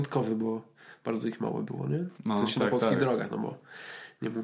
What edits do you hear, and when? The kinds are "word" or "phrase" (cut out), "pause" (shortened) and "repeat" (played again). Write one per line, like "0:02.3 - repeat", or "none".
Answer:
0:02.1 - pause